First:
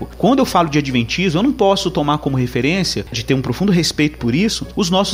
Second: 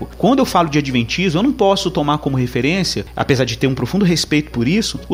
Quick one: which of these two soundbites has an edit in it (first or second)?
first